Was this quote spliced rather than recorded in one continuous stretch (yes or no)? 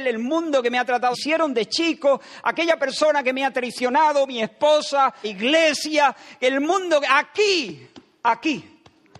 yes